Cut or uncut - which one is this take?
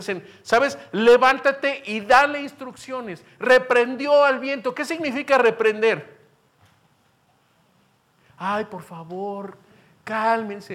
uncut